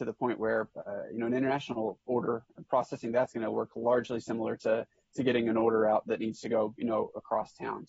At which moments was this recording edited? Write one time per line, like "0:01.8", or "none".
none